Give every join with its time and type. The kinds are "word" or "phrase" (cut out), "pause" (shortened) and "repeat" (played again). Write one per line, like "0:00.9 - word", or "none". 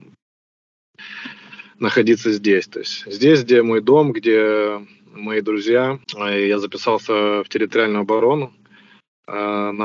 0:06.0 - pause